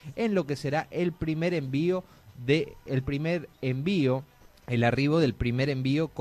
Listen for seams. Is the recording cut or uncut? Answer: cut